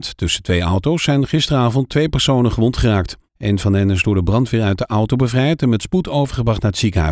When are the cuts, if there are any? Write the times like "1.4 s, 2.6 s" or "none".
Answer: 3.3 s